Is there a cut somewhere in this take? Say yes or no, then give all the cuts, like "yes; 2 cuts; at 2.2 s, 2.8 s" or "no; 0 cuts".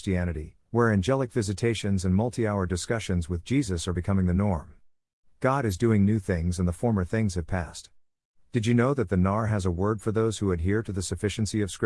no; 0 cuts